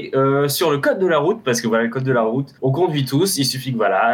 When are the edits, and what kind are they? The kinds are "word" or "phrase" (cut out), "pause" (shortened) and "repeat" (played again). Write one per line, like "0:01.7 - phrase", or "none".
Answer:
0:02.5 - pause

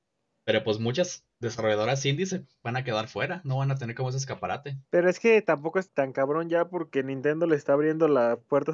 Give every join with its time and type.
0:01.3 - pause
0:04.8 - pause
0:05.9 - word

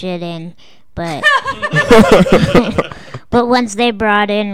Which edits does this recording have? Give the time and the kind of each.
none

